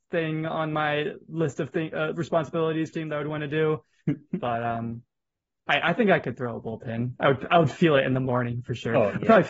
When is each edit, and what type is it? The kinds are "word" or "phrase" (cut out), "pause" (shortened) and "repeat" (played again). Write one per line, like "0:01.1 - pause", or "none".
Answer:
0:02.9 - phrase